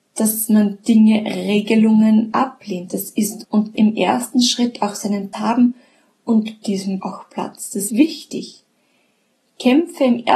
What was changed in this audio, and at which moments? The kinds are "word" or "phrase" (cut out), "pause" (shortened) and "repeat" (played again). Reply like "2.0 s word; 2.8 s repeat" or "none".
2.3 s word; 3.4 s word; 3.7 s word; 5.3 s word; 6.6 s word; 7.0 s word; 7.9 s word